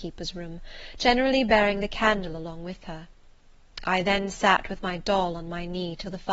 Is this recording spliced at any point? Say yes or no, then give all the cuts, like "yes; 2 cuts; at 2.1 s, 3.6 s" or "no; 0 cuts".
no; 0 cuts